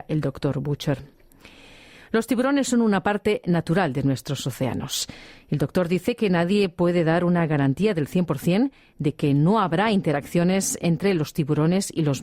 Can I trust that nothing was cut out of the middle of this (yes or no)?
yes